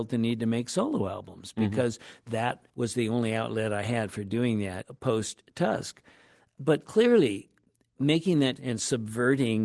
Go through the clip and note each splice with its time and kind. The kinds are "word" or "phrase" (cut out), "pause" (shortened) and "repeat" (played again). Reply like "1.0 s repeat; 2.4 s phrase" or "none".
2.7 s pause; 8.6 s word